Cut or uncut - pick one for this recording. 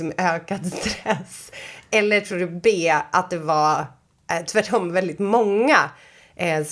uncut